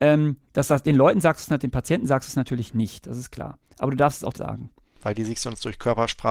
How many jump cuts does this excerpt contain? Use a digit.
1